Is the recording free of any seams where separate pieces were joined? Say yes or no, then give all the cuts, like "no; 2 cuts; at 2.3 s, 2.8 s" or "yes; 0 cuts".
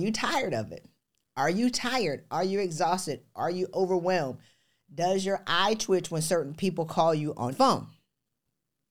no; 1 cut; at 7.5 s